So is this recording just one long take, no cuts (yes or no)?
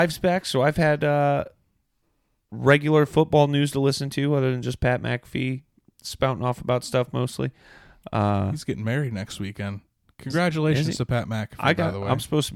yes